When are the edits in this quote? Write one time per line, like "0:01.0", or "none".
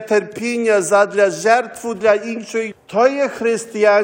0:02.7